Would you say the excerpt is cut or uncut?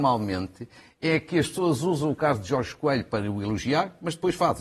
uncut